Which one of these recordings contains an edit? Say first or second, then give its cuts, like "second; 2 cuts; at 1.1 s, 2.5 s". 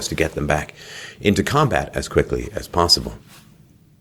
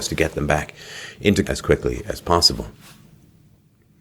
second; 1 cut; at 1.4 s